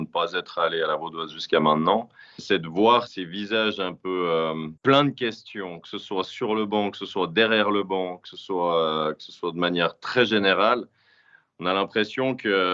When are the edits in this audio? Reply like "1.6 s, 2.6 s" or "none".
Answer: 2.4 s, 3.1 s, 4.8 s